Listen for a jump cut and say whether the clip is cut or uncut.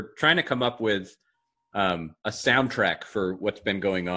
cut